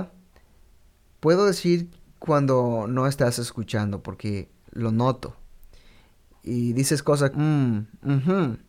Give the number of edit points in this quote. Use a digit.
1